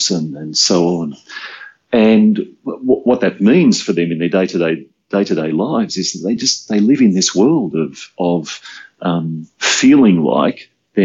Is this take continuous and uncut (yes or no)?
yes